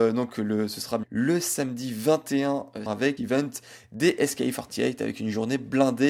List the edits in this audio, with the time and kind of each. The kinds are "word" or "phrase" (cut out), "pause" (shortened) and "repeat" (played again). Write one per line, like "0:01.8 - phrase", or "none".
0:01.0 - word
0:02.9 - word
0:03.2 - word